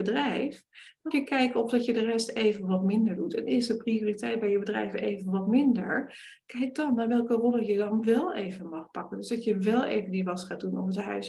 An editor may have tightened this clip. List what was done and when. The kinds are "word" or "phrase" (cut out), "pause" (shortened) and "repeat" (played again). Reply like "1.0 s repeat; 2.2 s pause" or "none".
1.1 s word